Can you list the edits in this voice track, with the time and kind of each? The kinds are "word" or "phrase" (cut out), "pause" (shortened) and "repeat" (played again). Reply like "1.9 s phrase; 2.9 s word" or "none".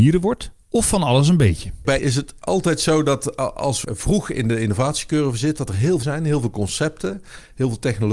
2.0 s word; 3.8 s word; 6.0 s word